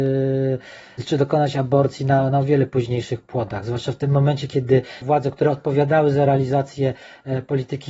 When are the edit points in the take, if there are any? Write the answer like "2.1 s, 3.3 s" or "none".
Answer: 5.0 s